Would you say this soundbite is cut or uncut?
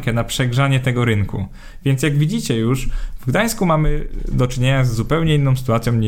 uncut